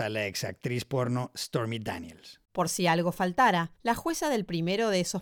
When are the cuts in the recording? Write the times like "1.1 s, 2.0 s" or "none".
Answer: 2.4 s, 3.8 s